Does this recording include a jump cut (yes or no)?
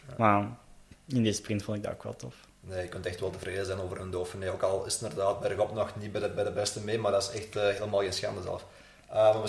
no